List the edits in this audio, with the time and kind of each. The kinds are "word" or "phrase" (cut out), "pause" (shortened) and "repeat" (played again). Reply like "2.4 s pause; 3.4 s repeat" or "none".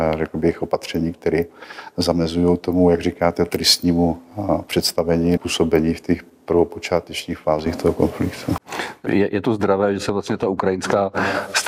5.4 s word